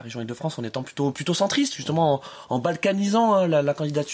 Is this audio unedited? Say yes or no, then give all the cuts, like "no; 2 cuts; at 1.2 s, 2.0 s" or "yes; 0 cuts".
yes; 0 cuts